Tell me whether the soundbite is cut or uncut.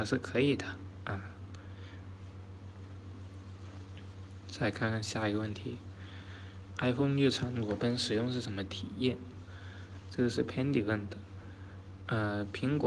uncut